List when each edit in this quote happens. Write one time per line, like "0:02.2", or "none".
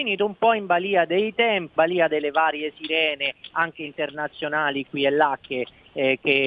0:01.8